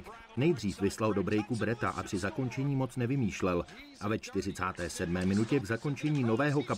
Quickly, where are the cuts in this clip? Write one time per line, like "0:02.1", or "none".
0:02.0
0:05.6